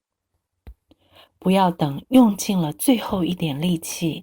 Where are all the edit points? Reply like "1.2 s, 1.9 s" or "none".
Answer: none